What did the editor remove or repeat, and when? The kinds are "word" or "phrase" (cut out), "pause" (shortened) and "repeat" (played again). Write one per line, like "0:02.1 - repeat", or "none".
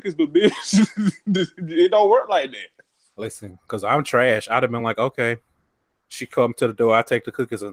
none